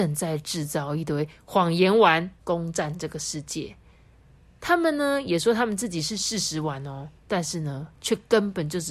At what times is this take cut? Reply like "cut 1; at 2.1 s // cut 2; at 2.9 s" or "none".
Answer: cut 1; at 2.4 s // cut 2; at 7.2 s